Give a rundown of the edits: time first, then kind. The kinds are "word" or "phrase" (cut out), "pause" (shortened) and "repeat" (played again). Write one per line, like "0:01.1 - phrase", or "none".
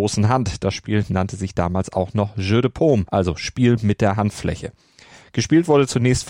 0:03.1 - pause